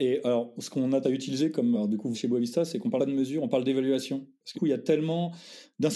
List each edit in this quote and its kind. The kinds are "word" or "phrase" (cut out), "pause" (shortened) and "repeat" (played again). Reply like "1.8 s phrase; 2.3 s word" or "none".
1.0 s word; 1.7 s word; 2.1 s word; 3.0 s word; 4.5 s word

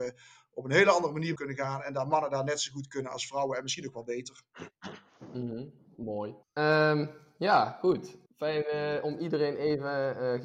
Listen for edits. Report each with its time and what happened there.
1.4 s phrase; 6.4 s pause; 8.3 s pause

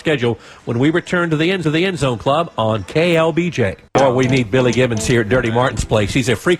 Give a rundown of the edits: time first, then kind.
1.6 s repeat; 3.9 s pause

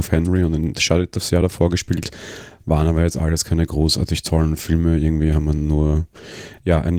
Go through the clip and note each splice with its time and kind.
none

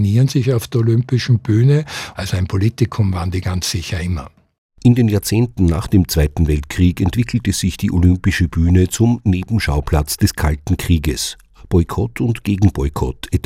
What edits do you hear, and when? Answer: none

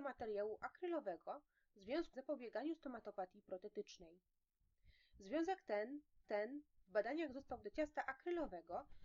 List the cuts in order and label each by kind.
2.1 s phrase; 6.2 s repeat; 7.6 s word

